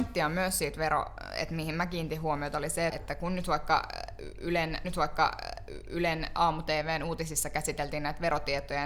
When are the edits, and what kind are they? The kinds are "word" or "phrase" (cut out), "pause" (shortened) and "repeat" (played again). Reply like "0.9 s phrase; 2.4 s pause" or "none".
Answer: 2.9 s word; 4.8 s repeat